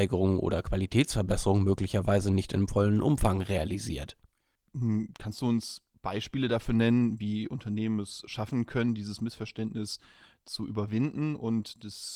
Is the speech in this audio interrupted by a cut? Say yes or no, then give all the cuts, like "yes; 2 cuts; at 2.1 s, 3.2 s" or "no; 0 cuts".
no; 0 cuts